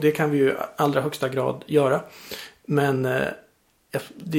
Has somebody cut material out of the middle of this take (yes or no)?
no